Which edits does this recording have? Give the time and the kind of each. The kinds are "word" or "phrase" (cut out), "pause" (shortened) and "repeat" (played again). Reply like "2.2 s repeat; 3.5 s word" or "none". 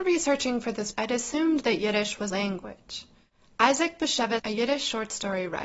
0.9 s word; 2.3 s phrase; 4.4 s word